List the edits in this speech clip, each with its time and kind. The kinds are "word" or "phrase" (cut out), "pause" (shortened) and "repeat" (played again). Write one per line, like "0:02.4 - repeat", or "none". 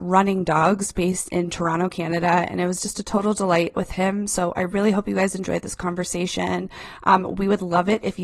0:03.7 - phrase